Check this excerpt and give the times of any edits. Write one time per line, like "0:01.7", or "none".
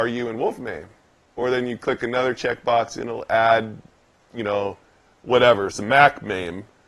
none